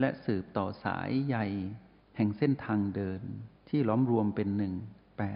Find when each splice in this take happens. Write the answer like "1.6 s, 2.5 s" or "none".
3.6 s